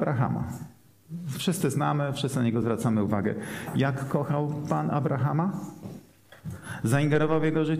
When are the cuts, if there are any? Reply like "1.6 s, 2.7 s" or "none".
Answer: none

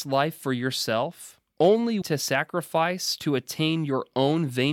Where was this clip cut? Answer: 2.0 s

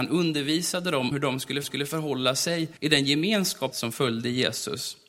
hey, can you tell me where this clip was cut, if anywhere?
1.1 s, 1.6 s, 2.8 s, 3.7 s

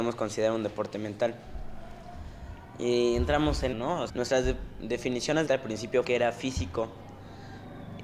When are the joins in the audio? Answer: 3.7 s, 4.1 s, 5.5 s, 6.0 s

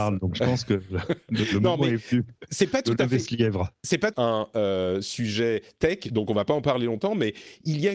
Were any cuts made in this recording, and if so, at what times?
4.1 s

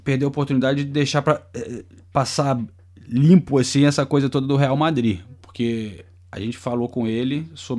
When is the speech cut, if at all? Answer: none

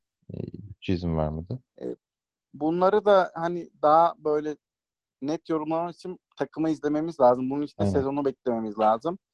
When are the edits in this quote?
none

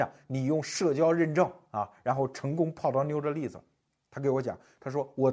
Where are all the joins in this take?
none

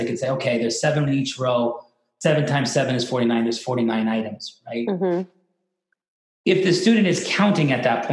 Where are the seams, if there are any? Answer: 1.1 s

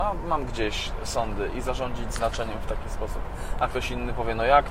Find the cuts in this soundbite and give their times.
none

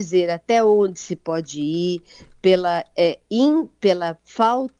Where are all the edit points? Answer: none

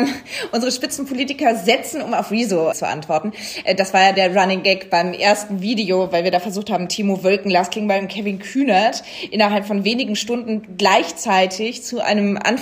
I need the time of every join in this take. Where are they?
2.7 s

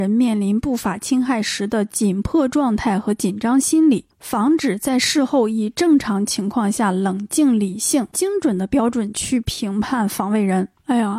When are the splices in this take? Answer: 8.1 s

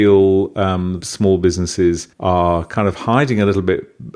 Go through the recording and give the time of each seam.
1.0 s, 2.1 s

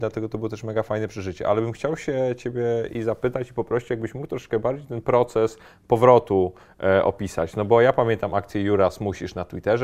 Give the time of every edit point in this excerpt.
none

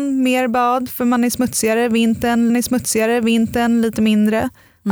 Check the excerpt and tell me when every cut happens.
2.5 s

